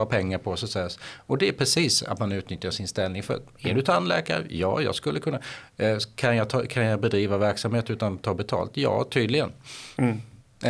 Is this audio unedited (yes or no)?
yes